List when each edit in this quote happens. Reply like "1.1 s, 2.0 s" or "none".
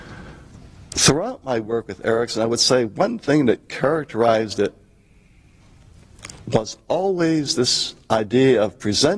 none